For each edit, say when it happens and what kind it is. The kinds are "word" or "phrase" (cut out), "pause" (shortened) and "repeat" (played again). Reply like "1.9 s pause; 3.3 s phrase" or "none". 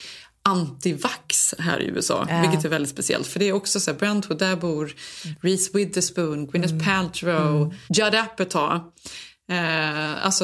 7.9 s pause